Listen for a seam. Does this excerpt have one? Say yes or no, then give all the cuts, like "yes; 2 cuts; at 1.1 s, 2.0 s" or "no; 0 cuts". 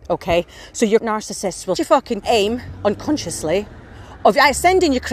yes; 3 cuts; at 1.0 s, 1.7 s, 2.2 s